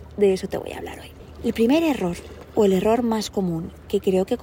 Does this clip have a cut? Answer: no; 0 cuts

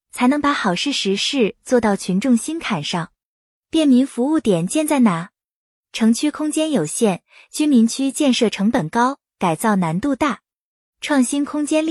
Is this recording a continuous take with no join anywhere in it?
yes; 0 cuts

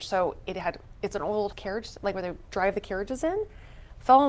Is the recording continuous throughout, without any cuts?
no; 1 cut; at 1.5 s

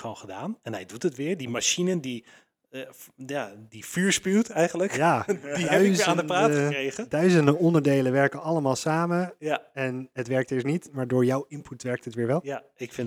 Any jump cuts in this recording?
yes; 1 cut; at 3.7 s

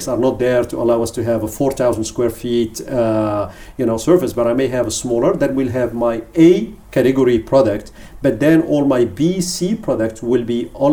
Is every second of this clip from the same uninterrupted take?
yes; 0 cuts

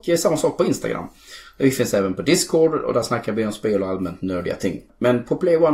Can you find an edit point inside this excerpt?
no; 0 cuts

